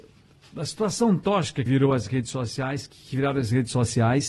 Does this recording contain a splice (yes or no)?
yes